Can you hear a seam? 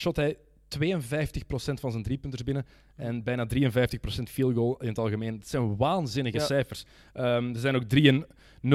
no; 0 cuts

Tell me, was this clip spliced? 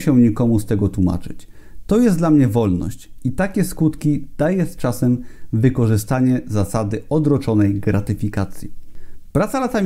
no; 0 cuts

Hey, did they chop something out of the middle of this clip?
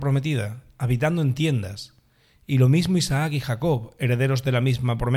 no; 0 cuts

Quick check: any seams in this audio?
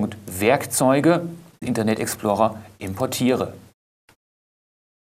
yes; 1 cut; at 1.6 s

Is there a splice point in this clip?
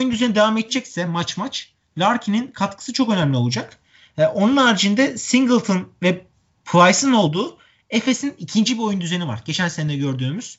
no; 0 cuts

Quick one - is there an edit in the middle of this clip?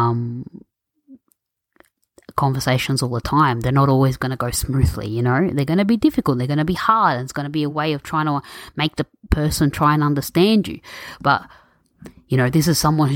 no; 0 cuts

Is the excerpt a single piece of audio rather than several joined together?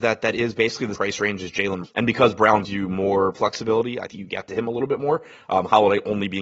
no; 5 cuts; at 1.0 s, 1.8 s, 2.6 s, 3.3 s, 4.1 s

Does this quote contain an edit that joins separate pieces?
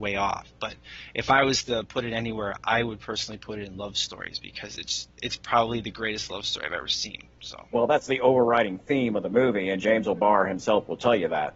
no; 0 cuts

